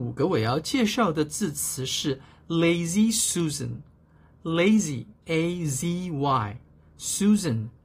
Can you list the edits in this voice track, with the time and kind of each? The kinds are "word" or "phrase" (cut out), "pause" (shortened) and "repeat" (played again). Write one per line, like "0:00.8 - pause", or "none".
0:05.2 - word